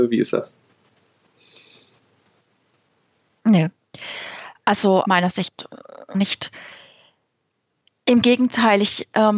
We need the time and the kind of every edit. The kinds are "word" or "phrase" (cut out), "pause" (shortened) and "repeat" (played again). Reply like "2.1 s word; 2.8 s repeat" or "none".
5.0 s word; 6.1 s phrase